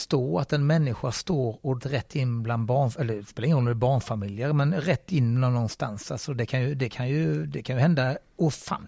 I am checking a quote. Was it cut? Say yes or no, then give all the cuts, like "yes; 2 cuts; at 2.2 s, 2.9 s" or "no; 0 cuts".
yes; 1 cut; at 1.8 s